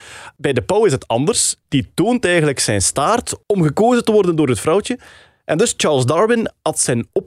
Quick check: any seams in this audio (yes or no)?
no